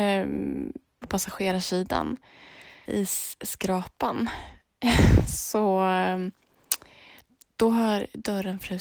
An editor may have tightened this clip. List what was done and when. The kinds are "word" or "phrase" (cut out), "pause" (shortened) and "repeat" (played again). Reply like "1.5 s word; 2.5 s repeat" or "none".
1.0 s word; 2.9 s phrase